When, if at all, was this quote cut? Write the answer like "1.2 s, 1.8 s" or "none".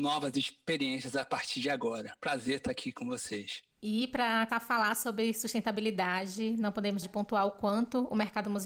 4.5 s, 7.0 s